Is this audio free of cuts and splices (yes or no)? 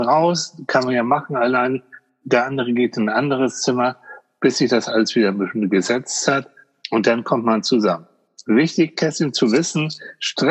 yes